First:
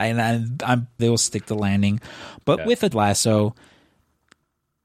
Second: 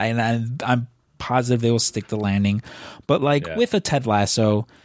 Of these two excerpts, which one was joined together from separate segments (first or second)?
first